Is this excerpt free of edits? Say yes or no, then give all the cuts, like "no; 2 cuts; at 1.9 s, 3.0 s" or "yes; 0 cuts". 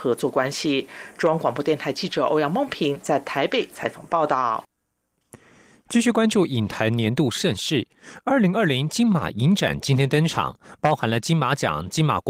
yes; 0 cuts